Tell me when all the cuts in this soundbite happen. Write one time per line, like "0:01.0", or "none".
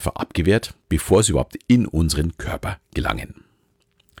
none